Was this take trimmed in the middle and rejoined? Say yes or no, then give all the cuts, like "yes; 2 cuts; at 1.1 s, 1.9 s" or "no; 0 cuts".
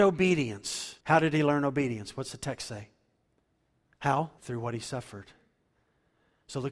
yes; 2 cuts; at 1.0 s, 4.4 s